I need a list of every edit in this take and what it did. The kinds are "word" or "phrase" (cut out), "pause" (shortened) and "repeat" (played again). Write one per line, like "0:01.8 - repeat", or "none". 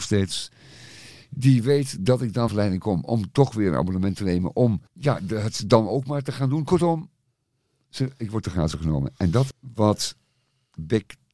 0:02.5 - phrase
0:04.9 - pause
0:09.5 - word